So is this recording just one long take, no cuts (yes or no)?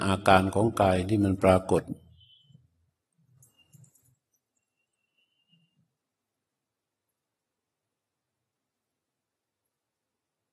yes